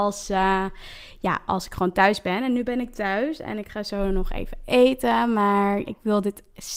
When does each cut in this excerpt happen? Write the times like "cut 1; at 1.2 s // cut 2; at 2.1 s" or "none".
cut 1; at 5.9 s